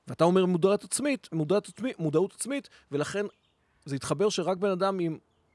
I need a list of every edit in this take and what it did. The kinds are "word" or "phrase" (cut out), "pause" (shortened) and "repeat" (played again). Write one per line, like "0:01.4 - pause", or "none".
none